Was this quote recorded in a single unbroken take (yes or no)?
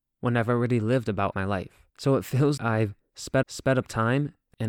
no